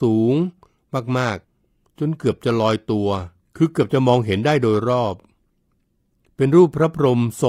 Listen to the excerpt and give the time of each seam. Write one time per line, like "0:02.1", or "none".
0:01.4
0:03.4